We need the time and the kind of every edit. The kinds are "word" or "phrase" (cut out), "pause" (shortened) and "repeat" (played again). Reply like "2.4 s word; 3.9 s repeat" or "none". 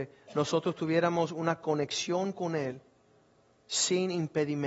none